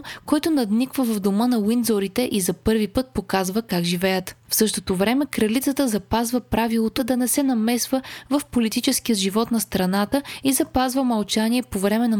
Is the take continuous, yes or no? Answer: no